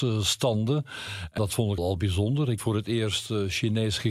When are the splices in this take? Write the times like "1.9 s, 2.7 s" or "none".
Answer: 1.4 s, 1.8 s, 2.6 s